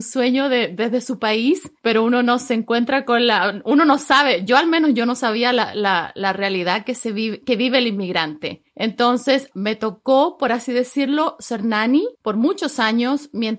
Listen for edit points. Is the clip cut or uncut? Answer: cut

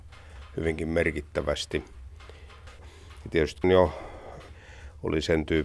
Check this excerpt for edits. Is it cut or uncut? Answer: cut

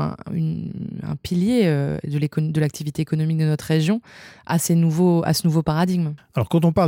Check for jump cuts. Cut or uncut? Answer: uncut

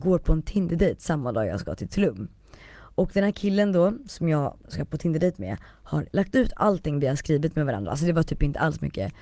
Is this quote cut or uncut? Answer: uncut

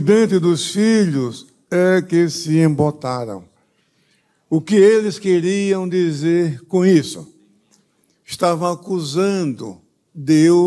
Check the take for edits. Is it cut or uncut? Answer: uncut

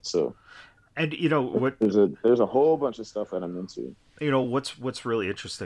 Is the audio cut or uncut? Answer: uncut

